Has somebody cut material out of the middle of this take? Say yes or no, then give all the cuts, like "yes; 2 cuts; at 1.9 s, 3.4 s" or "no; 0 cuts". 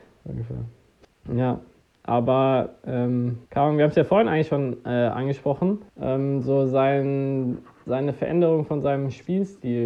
yes; 2 cuts; at 3.5 s, 5.9 s